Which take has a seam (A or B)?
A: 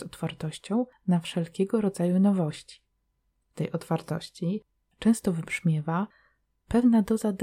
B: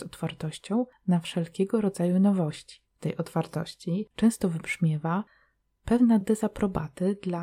B